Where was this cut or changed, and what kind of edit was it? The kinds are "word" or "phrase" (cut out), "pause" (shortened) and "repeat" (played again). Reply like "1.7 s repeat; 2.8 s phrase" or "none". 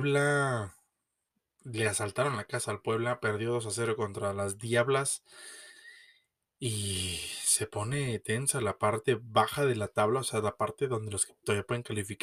none